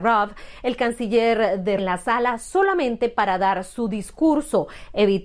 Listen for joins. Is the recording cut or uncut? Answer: cut